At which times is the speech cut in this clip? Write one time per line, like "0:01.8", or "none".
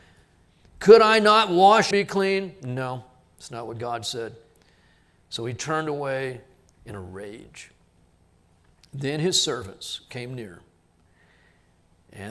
0:01.9